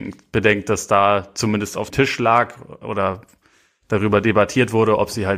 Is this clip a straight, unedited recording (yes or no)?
no